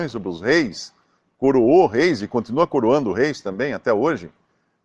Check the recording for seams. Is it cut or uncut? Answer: uncut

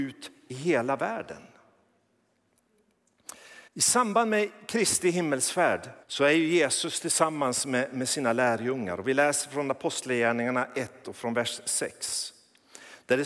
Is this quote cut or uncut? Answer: cut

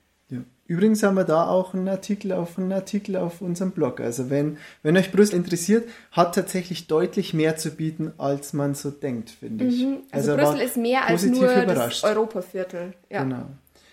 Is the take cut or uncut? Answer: cut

